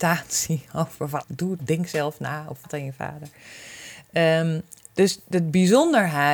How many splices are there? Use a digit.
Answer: 4